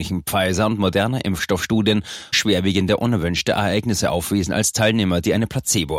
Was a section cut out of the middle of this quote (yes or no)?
yes